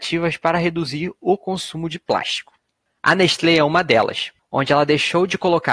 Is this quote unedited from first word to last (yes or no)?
yes